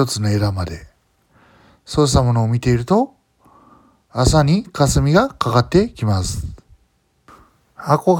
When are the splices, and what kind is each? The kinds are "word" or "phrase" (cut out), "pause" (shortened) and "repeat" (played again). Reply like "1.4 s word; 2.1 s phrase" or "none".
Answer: none